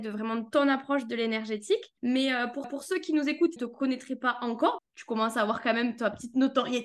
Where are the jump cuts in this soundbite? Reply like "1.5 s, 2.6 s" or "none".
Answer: 2.0 s, 2.6 s, 3.6 s, 4.8 s